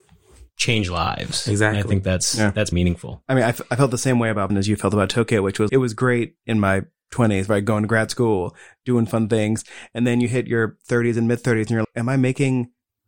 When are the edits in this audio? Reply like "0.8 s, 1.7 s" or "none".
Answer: 2.7 s, 4.5 s, 5.7 s, 11.8 s